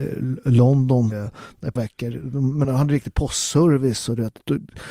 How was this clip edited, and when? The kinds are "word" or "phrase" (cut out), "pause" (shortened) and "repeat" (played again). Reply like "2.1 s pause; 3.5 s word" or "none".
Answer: 1.1 s word; 1.8 s word; 2.6 s word